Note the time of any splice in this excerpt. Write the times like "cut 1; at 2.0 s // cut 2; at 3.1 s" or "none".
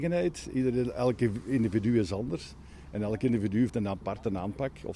cut 1; at 3.7 s